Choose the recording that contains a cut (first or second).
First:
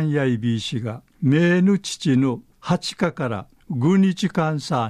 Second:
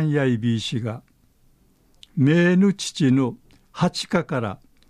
first